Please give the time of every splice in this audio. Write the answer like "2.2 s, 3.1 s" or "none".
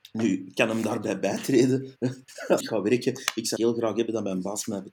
2.6 s, 3.6 s